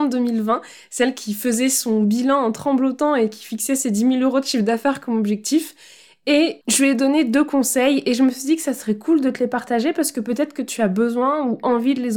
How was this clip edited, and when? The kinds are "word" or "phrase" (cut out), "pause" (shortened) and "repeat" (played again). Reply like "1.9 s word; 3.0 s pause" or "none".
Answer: 6.6 s pause